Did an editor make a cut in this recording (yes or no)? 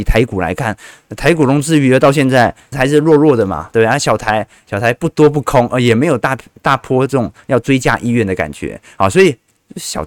yes